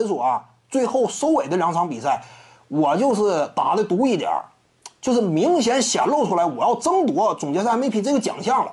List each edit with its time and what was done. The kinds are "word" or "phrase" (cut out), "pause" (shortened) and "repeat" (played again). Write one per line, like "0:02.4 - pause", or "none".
none